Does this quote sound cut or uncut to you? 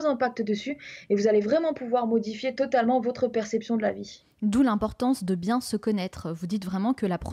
uncut